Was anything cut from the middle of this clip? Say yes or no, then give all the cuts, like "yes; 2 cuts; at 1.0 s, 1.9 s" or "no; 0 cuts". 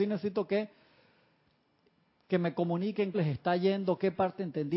yes; 1 cut; at 3.1 s